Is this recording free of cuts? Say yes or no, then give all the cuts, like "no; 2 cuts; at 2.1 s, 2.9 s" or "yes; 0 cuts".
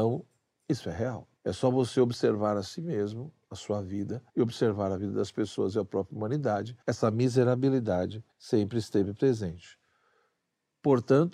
no; 4 cuts; at 1.4 s, 4.3 s, 6.8 s, 8.3 s